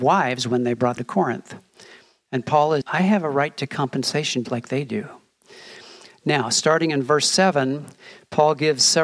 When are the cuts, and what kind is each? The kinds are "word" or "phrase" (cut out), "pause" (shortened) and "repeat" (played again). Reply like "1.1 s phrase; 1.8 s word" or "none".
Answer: 1.0 s word; 2.8 s word; 4.4 s word